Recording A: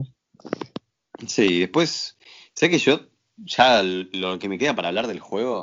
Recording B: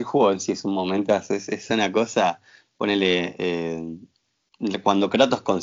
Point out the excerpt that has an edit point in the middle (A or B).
A